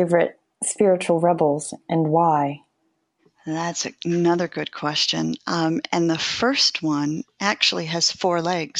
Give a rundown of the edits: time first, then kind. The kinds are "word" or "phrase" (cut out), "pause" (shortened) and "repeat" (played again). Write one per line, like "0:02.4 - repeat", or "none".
none